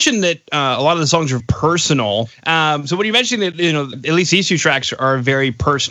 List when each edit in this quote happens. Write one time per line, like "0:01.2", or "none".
0:01.4
0:03.9